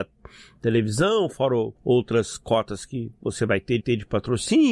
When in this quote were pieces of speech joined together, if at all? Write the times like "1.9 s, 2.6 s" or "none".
1.8 s, 3.8 s